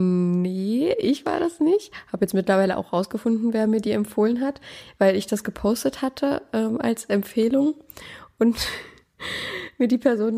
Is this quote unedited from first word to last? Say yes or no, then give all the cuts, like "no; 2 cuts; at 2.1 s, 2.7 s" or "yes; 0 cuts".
yes; 0 cuts